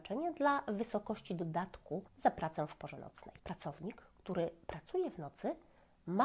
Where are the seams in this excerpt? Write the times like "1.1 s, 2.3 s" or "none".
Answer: 2.1 s, 3.4 s